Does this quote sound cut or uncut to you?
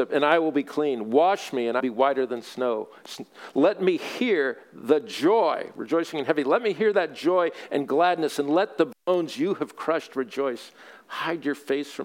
cut